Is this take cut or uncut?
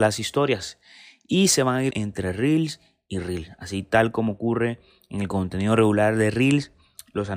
cut